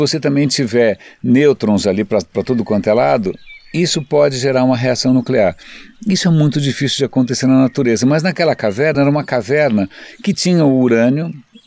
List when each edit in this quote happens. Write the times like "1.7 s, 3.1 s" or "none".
none

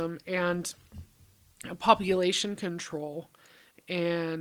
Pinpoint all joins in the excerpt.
none

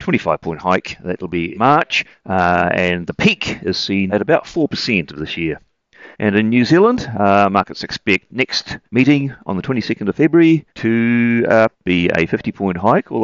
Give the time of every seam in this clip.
1.5 s, 2.1 s, 4.1 s, 5.1 s, 6.1 s, 8.3 s, 8.9 s, 10.7 s, 11.7 s

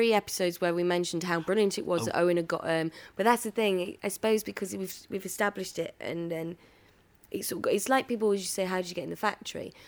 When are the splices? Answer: none

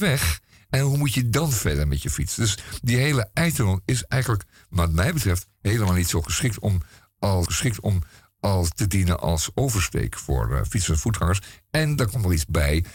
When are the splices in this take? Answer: 7.5 s

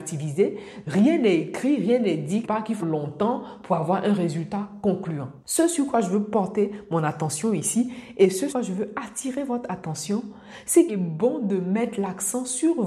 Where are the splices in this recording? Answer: 2.4 s, 2.8 s, 5.4 s, 8.5 s, 10.9 s

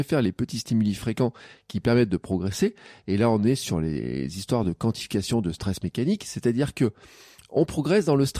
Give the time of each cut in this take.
none

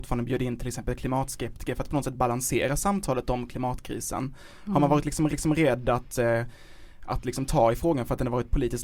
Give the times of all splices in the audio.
5.3 s

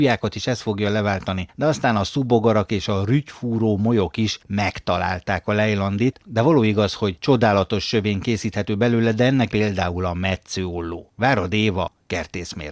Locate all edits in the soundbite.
9.5 s

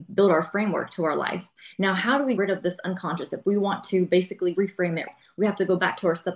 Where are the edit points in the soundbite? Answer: 2.4 s, 4.5 s, 5.1 s

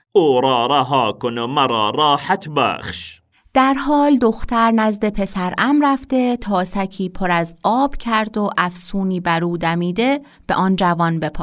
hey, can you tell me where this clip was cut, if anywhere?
none

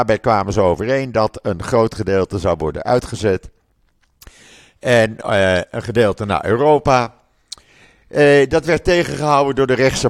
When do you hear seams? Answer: none

